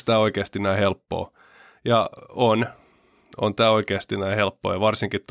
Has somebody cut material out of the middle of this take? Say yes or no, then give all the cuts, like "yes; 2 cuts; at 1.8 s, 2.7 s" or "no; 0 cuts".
no; 0 cuts